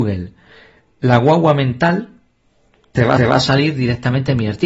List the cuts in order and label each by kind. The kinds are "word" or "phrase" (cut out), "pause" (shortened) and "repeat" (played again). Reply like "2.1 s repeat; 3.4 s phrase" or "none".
3.2 s repeat